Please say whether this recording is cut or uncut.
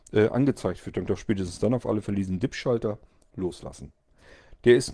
cut